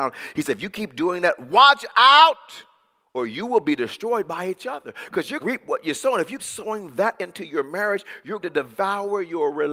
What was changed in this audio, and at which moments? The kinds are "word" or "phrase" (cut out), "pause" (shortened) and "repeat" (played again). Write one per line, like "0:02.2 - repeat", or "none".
0:05.4 - word
0:06.4 - word
0:08.4 - word